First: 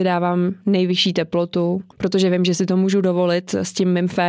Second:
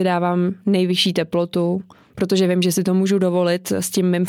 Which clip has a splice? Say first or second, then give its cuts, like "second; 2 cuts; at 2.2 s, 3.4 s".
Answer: first; 1 cut; at 1.9 s